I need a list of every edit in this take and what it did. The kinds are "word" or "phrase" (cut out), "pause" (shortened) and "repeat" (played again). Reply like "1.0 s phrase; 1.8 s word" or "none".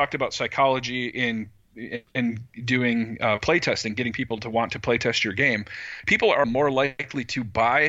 6.4 s word